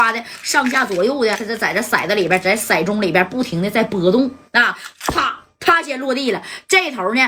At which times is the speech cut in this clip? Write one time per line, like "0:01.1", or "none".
0:01.4